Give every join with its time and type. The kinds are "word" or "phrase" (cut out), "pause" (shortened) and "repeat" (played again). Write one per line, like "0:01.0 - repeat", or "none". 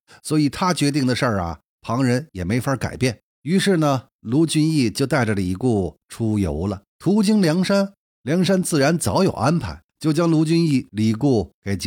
0:03.3 - pause
0:06.0 - pause
0:06.9 - pause
0:09.9 - pause